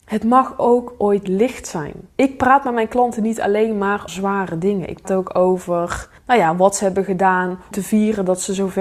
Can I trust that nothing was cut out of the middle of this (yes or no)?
no